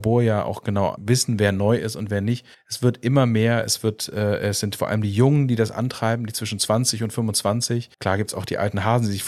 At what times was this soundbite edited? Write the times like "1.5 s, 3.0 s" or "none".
2.5 s, 7.9 s